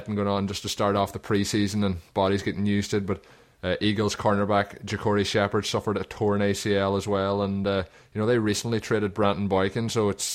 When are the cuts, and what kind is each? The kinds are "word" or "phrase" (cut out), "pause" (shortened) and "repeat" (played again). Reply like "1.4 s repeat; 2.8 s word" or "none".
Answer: none